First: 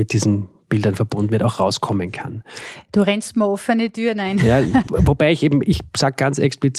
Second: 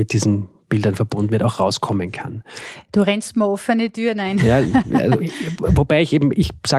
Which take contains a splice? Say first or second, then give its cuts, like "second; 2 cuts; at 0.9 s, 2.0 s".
first; 1 cut; at 4.9 s